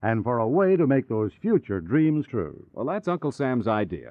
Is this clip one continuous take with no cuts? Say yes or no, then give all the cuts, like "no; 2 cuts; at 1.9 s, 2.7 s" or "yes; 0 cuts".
no; 1 cut; at 2.3 s